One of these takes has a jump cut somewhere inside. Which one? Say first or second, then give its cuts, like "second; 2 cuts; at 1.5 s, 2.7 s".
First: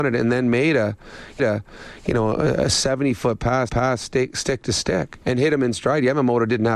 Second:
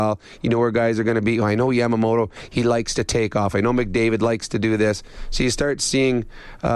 first; 3 cuts; at 1.4 s, 3.7 s, 5.2 s